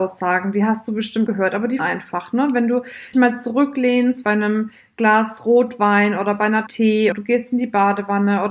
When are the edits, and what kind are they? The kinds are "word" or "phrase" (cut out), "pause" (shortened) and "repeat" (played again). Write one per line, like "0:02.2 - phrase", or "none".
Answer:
0:01.3 - word
0:01.8 - word
0:03.1 - word
0:04.2 - word
0:06.7 - word
0:07.1 - word